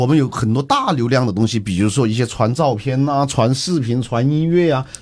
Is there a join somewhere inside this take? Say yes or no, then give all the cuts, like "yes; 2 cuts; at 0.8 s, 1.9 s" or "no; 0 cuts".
no; 0 cuts